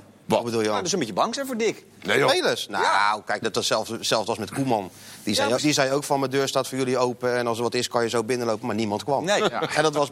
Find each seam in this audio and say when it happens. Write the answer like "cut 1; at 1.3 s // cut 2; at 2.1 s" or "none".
cut 1; at 3.4 s // cut 2; at 5.6 s